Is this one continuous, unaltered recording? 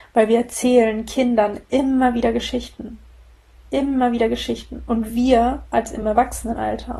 yes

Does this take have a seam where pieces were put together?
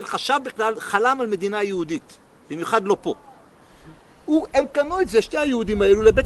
no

